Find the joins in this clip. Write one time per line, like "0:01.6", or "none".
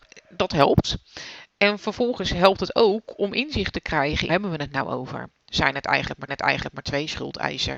0:04.3
0:06.3